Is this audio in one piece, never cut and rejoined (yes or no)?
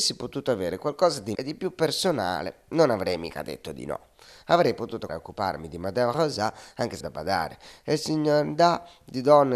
no